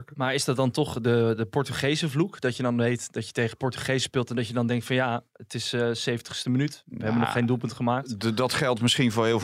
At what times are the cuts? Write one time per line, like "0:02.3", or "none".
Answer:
none